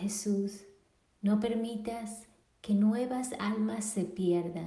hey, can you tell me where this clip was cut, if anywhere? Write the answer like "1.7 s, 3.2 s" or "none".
none